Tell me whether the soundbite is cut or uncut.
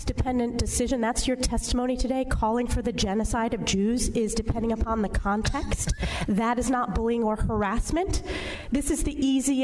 uncut